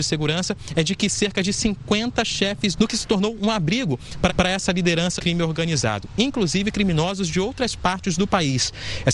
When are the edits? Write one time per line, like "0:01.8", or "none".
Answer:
0:02.8
0:04.3
0:05.2